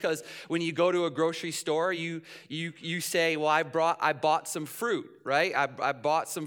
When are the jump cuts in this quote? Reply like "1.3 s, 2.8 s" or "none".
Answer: none